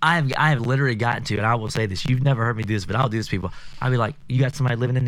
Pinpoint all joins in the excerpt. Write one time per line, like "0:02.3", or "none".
none